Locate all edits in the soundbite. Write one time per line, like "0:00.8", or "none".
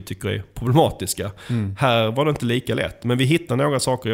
none